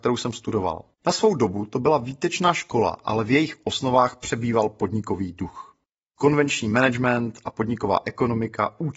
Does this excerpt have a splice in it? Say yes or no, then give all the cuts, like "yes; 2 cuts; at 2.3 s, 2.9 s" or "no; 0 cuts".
yes; 2 cuts; at 0.9 s, 6.0 s